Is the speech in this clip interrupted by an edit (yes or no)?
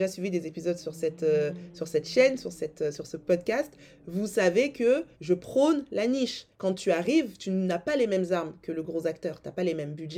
yes